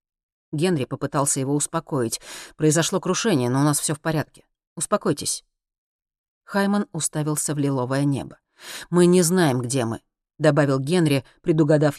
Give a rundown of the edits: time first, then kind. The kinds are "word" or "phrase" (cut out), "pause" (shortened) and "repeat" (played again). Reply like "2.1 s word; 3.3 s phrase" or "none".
none